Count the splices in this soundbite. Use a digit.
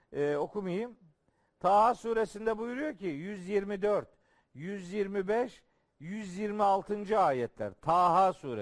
0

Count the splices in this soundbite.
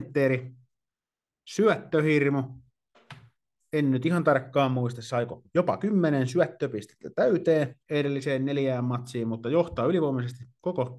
1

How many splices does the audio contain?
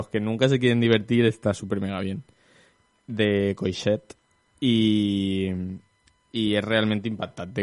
0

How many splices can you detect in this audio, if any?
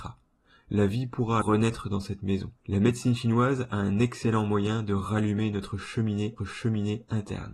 3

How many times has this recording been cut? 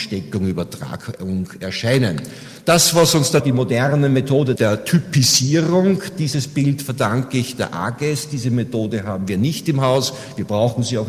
2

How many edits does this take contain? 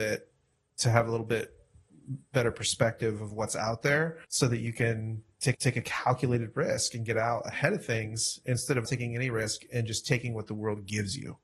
3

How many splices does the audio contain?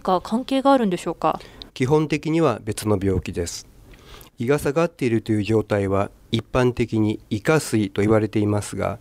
1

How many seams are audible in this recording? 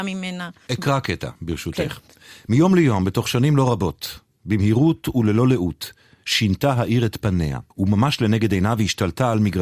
1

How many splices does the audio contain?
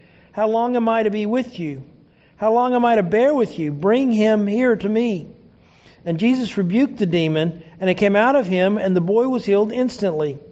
0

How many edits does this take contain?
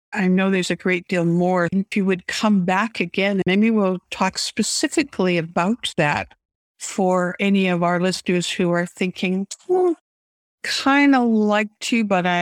0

